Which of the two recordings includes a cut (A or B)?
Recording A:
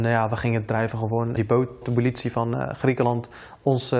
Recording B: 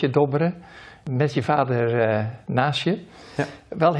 A